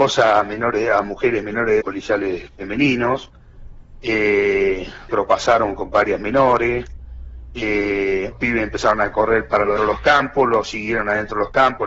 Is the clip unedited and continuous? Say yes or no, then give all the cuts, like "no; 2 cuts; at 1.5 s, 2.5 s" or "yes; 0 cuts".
no; 4 cuts; at 1.8 s, 5.1 s, 8.3 s, 9.8 s